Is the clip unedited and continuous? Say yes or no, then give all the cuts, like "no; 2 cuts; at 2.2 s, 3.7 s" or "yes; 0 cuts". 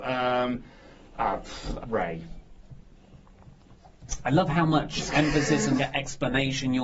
no; 2 cuts; at 1.8 s, 5.8 s